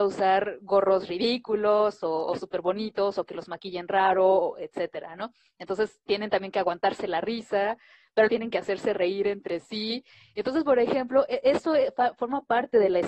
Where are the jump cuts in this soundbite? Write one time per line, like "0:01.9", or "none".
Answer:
0:08.3